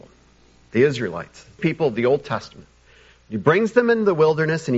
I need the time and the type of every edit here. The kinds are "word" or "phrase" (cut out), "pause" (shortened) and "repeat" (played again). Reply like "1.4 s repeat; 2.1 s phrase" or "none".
1.6 s word